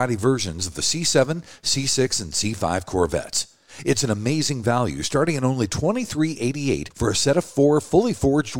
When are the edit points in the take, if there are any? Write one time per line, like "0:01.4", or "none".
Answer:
none